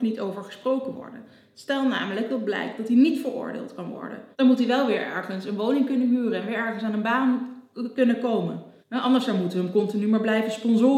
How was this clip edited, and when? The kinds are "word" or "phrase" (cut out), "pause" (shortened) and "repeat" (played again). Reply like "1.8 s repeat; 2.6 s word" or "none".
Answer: 4.3 s pause; 8.8 s pause